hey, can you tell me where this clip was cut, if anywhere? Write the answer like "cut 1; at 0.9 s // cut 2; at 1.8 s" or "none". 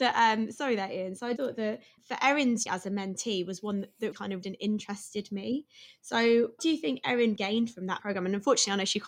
cut 1; at 1.4 s // cut 2; at 2.0 s // cut 3; at 2.7 s // cut 4; at 4.1 s // cut 5; at 4.4 s // cut 6; at 6.6 s // cut 7; at 7.4 s // cut 8; at 8.0 s